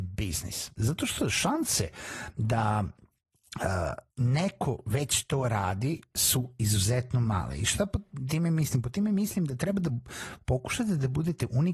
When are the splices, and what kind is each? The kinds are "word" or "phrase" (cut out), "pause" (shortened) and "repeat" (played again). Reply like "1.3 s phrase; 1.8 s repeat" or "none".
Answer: 4.1 s pause